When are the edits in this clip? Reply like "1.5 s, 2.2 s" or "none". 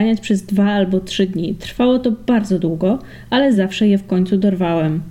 none